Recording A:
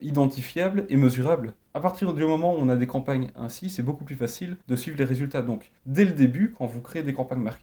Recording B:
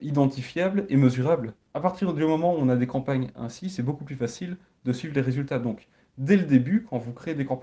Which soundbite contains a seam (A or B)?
A